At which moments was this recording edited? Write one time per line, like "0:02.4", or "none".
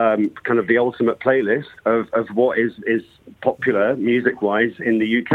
none